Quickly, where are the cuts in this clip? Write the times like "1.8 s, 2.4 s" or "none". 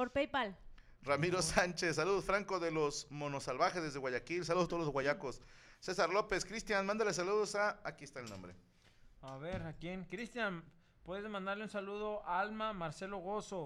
none